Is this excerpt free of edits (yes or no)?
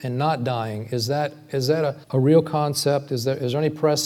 no